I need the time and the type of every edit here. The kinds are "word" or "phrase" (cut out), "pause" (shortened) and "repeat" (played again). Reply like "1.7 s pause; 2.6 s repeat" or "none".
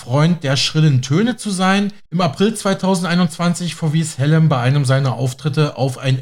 2.1 s pause